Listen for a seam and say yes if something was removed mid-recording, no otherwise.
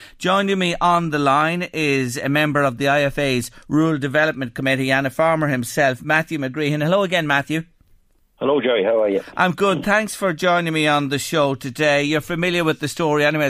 no